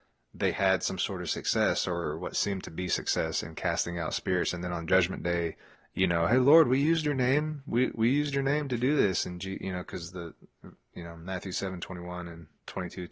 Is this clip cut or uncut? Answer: cut